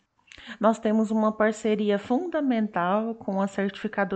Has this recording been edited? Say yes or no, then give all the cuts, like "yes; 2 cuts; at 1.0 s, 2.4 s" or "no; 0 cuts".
no; 0 cuts